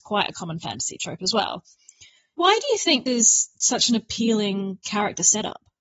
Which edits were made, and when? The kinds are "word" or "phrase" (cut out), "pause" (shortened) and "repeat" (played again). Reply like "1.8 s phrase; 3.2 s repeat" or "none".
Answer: 2.4 s word; 3.1 s word